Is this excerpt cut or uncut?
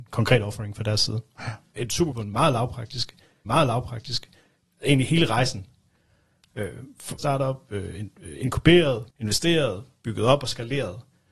cut